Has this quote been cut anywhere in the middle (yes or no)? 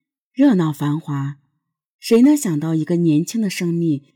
no